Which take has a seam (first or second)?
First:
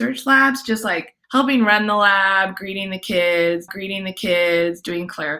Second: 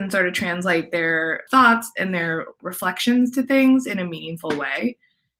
first